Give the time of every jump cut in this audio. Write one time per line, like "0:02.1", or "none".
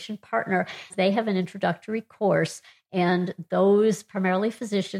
0:00.9